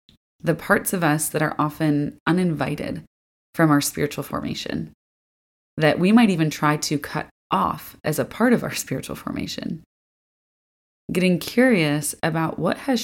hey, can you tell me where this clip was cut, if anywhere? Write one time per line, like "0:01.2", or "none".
none